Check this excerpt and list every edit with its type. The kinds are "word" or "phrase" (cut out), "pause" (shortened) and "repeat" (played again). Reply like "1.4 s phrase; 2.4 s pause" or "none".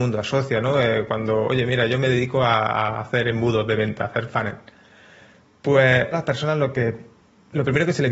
6.1 s phrase